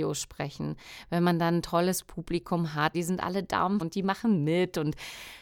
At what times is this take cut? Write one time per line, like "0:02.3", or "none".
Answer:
0:02.9
0:03.8